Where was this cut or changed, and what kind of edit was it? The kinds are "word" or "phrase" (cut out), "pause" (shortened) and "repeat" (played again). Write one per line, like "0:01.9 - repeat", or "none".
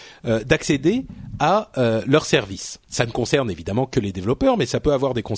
0:02.8 - pause